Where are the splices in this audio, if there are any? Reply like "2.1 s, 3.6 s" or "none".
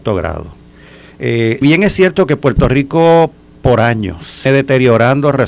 1.6 s, 4.5 s